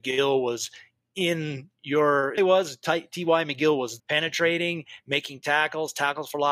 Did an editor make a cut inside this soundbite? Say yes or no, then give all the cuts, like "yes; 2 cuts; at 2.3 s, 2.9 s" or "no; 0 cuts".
yes; 2 cuts; at 2.4 s, 4.0 s